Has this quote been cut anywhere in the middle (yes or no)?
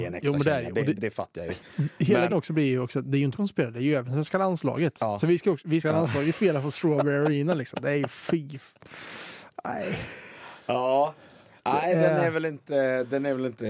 yes